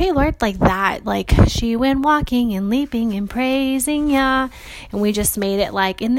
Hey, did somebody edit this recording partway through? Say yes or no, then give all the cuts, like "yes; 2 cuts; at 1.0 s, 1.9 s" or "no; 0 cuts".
no; 0 cuts